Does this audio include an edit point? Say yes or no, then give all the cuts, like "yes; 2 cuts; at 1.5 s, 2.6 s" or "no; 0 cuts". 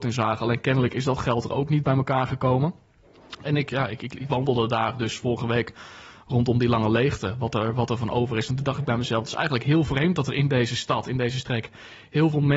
no; 0 cuts